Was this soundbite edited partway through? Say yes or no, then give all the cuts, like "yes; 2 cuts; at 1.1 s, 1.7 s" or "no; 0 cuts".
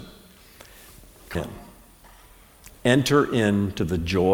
yes; 1 cut; at 1.4 s